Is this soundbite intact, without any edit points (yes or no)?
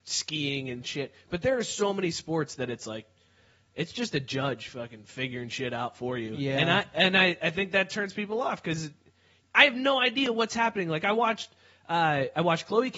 yes